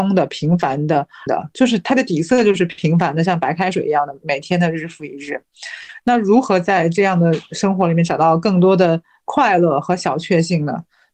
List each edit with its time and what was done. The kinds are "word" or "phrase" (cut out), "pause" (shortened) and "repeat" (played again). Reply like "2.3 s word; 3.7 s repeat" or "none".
1.3 s phrase